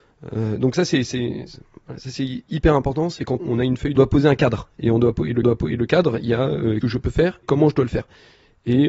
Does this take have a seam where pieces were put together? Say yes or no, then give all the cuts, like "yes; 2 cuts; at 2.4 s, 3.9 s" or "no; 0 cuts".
yes; 5 cuts; at 3.4 s, 4.0 s, 5.4 s, 6.8 s, 7.4 s